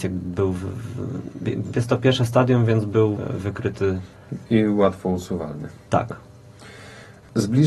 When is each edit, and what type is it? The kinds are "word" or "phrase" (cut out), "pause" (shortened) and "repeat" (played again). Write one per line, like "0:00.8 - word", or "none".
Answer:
0:03.2 - word